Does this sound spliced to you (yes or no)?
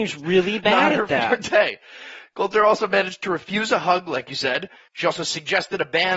no